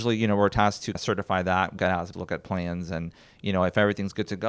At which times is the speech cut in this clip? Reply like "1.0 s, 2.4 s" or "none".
0.9 s, 1.8 s, 2.1 s